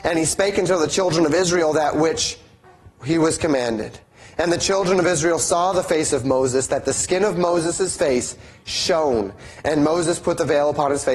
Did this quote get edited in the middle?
no; 0 cuts

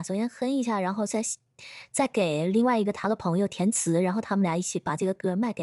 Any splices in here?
no; 0 cuts

